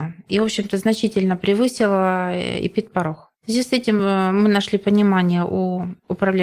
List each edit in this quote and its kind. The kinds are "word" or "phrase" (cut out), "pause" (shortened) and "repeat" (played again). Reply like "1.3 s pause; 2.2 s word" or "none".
none

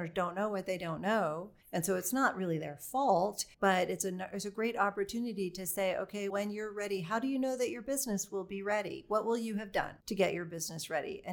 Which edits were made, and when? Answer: 1.6 s pause; 3.5 s pause; 6.3 s word; 10.0 s pause

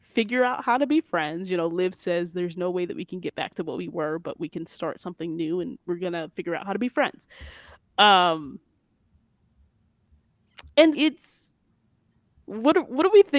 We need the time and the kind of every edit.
10.9 s word

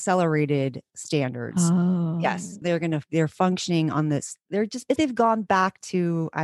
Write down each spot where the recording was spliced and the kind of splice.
2.6 s phrase; 5.0 s word

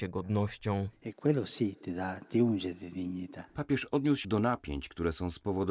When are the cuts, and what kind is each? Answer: 4.2 s phrase

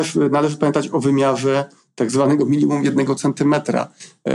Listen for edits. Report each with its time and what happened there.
none

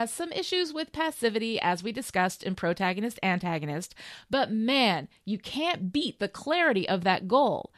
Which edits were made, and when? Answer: none

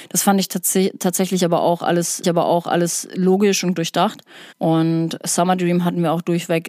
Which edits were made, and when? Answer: 2.2 s repeat; 3.8 s phrase; 4.5 s pause

